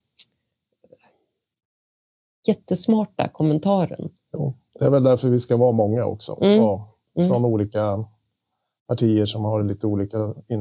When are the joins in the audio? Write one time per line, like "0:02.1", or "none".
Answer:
none